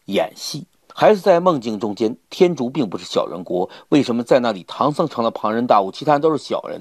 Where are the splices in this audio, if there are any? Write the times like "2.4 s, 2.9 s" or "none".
none